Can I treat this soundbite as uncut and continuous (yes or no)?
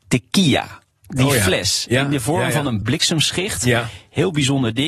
yes